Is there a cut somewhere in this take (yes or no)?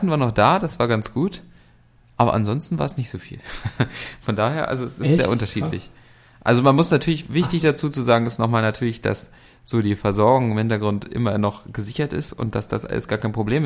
no